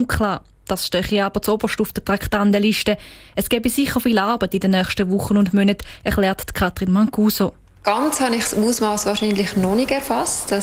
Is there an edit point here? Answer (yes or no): no